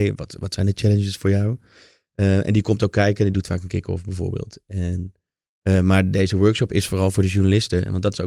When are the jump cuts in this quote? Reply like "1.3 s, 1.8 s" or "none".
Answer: none